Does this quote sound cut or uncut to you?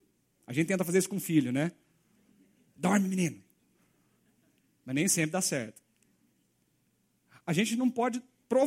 uncut